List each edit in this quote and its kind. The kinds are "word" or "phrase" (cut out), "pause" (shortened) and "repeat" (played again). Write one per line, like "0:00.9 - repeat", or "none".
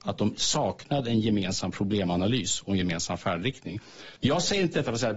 0:04.2 - pause